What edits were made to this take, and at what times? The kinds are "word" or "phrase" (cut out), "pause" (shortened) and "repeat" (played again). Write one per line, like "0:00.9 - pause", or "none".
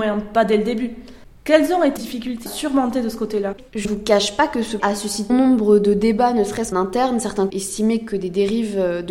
0:02.0 - word
0:02.5 - word
0:03.8 - word
0:04.8 - word
0:05.3 - word
0:06.7 - word
0:07.5 - word